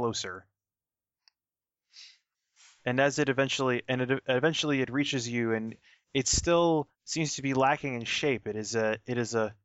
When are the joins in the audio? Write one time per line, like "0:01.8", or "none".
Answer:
none